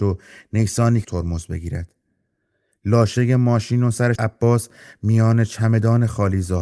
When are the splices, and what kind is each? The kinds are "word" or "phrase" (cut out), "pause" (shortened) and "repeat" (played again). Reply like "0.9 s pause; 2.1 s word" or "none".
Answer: 1.0 s word; 4.2 s word